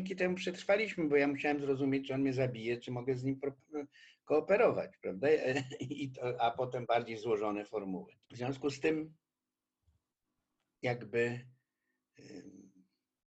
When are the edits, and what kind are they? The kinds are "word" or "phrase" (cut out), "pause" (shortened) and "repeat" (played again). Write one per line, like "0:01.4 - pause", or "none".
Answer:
0:08.2 - pause